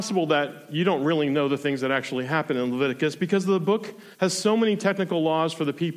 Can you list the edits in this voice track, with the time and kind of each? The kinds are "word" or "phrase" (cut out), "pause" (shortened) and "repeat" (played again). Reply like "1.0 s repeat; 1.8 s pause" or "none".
4.1 s pause